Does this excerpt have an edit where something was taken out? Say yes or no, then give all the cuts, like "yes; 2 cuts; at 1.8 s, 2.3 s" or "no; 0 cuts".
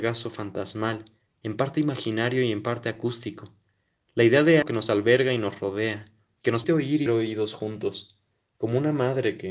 yes; 3 cuts; at 4.6 s, 6.6 s, 7.1 s